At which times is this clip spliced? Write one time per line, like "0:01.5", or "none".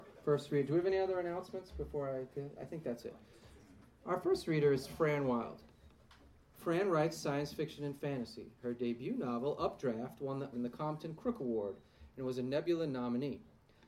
0:10.5